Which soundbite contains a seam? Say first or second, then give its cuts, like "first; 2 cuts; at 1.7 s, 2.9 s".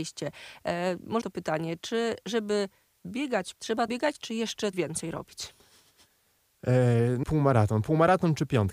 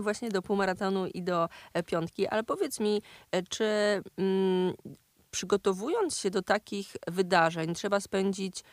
first; 5 cuts; at 1.2 s, 3.5 s, 3.9 s, 4.7 s, 7.2 s